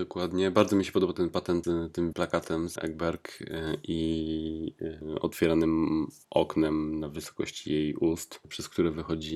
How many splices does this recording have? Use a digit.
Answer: 3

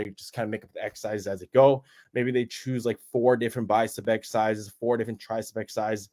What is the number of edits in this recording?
0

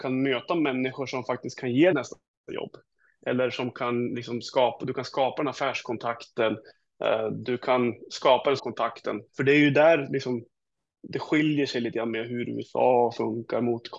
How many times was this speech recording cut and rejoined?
3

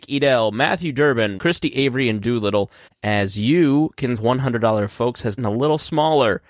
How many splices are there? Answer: 5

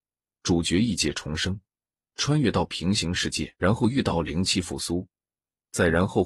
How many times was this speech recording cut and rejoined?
1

